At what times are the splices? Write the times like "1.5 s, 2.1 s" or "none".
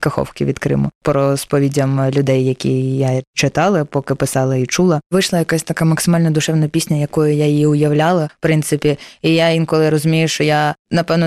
none